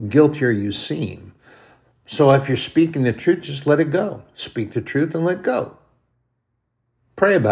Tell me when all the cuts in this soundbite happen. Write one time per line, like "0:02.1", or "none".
none